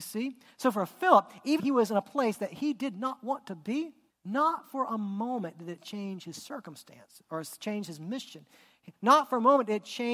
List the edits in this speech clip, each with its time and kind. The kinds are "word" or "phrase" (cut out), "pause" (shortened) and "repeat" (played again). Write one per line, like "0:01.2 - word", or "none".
0:01.6 - word
0:04.1 - pause